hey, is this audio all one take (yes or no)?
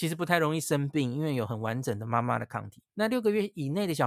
no